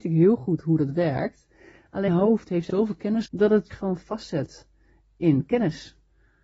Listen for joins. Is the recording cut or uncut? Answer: cut